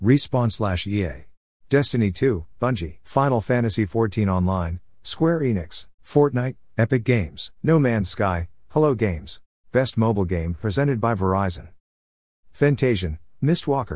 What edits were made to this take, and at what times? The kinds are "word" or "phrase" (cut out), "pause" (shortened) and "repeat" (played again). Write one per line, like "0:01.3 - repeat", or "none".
0:01.5 - pause
0:03.0 - pause
0:06.0 - pause
0:07.5 - pause
0:09.6 - pause